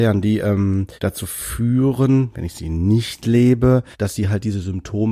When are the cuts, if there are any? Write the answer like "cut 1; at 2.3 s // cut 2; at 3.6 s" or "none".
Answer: cut 1; at 1.0 s // cut 2; at 3.9 s